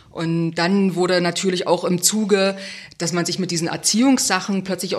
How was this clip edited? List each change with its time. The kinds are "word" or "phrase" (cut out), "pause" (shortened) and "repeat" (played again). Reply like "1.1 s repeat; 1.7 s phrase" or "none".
none